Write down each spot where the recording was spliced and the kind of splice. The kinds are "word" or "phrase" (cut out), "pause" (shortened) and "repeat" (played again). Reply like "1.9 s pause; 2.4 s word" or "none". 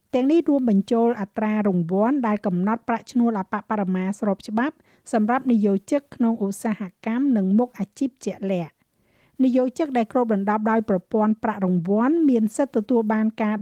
none